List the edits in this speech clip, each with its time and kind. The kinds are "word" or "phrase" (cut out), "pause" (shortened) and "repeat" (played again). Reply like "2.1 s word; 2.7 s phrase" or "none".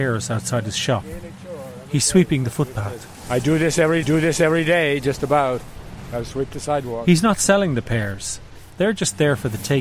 4.0 s repeat